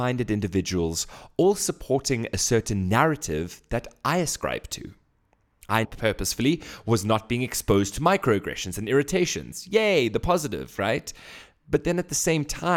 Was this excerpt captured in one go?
no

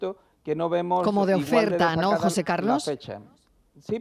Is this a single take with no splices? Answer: yes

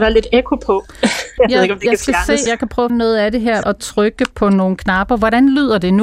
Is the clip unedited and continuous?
no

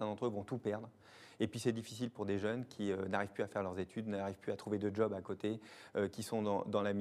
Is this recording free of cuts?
yes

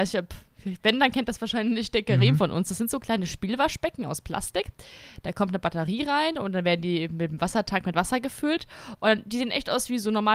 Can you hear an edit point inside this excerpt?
no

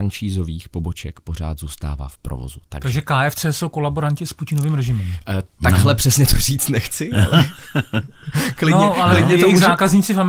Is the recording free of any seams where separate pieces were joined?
yes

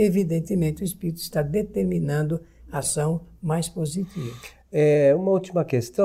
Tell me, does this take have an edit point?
yes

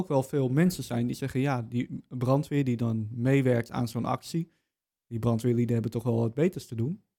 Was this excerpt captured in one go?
yes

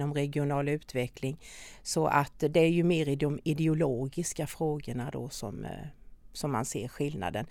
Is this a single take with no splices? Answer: yes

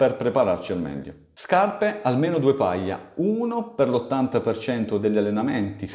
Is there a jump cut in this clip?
no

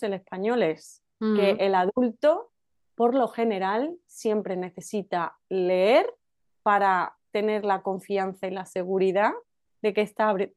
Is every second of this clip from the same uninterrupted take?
no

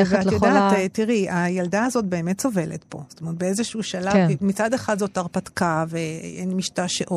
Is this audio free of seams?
yes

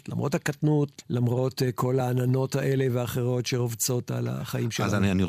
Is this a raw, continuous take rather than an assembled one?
yes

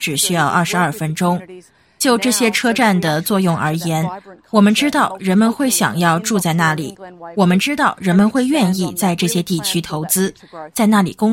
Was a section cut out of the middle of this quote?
no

